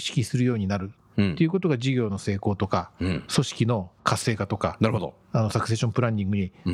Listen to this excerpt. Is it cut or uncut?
cut